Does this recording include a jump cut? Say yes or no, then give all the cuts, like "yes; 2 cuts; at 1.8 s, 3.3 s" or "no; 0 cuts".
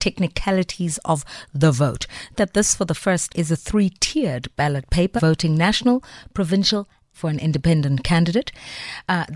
yes; 4 cuts; at 2.4 s, 3.3 s, 5.2 s, 7.1 s